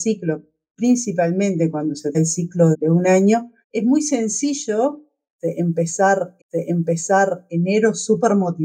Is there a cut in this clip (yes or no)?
yes